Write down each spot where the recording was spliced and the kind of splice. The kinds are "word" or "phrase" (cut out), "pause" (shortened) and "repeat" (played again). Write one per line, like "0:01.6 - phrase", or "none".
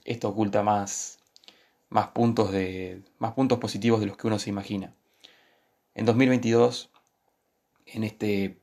none